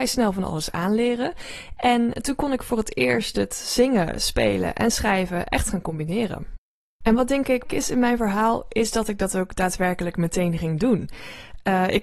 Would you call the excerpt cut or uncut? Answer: cut